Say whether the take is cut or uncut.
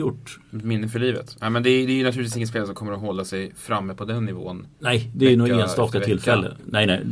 cut